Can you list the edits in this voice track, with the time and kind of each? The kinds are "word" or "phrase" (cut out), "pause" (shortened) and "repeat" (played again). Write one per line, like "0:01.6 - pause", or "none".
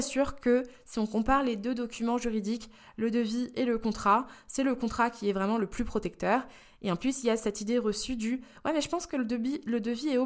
none